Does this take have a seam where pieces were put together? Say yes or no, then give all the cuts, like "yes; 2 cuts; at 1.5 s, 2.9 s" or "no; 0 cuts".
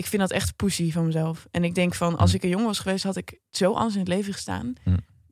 no; 0 cuts